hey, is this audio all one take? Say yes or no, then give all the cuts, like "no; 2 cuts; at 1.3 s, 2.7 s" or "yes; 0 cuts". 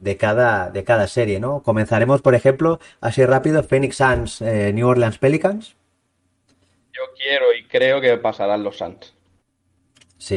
yes; 0 cuts